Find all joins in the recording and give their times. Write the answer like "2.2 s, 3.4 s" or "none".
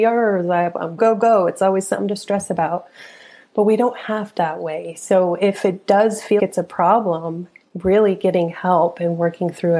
1.0 s, 4.4 s, 6.4 s